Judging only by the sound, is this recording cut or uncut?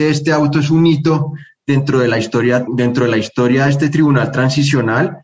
cut